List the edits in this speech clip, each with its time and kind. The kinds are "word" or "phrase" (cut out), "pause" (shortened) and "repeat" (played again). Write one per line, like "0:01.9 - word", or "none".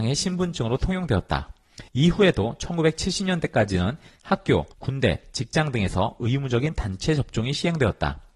0:01.9 - pause
0:04.7 - pause